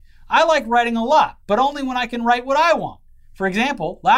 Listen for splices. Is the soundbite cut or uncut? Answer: uncut